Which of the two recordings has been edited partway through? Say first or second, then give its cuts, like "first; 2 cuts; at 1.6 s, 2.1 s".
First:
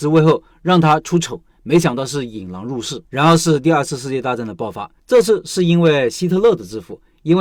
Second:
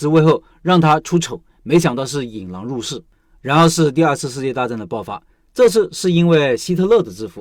first; 2 cuts; at 3.0 s, 5.0 s